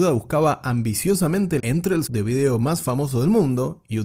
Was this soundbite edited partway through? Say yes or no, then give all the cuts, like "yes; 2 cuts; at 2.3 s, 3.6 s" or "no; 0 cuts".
yes; 2 cuts; at 1.6 s, 2.1 s